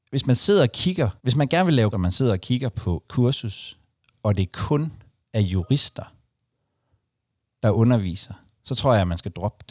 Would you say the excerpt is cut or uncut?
cut